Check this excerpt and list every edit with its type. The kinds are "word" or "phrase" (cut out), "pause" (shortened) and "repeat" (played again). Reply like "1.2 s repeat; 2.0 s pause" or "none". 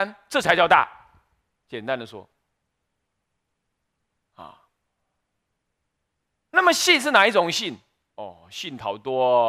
none